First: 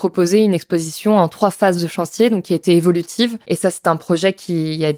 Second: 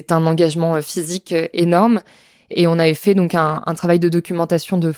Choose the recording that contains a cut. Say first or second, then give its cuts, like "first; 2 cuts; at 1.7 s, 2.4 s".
first; 1 cut; at 3.4 s